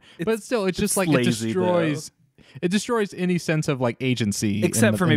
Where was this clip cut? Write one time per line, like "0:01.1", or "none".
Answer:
none